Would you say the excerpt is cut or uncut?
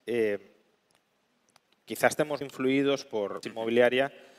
cut